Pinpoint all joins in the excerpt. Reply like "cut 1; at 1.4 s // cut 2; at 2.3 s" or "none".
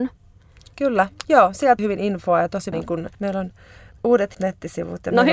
cut 1; at 1.8 s // cut 2; at 2.7 s // cut 3; at 3.1 s // cut 4; at 4.3 s